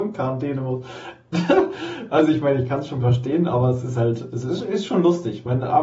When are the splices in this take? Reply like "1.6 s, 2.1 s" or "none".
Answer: none